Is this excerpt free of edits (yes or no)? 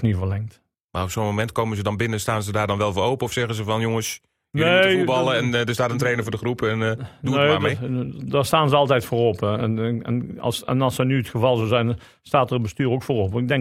yes